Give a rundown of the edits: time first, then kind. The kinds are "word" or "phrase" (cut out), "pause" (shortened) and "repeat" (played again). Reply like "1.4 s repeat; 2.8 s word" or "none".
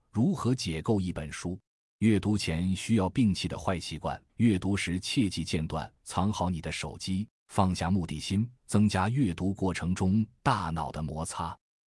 1.7 s pause; 4.3 s pause; 6.0 s pause; 7.4 s pause; 8.6 s pause